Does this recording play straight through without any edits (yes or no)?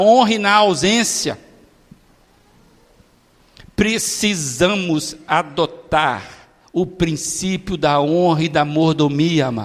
yes